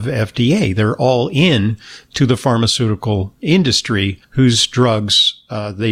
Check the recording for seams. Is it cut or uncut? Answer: cut